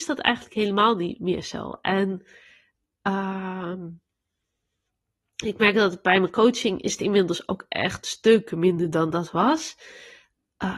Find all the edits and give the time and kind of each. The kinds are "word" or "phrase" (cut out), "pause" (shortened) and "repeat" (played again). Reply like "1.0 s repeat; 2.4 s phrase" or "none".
none